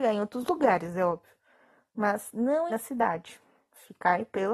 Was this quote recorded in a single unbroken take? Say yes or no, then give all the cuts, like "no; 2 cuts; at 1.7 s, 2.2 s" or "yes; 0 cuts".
no; 1 cut; at 2.7 s